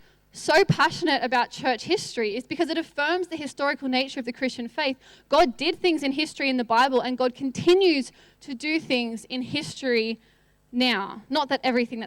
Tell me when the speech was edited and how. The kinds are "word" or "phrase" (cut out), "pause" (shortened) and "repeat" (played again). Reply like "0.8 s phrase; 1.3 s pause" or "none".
none